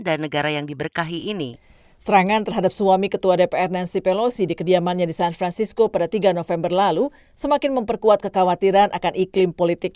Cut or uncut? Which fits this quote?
uncut